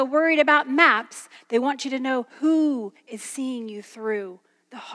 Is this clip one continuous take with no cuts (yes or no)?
no